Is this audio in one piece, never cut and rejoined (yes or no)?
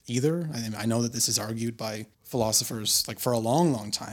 no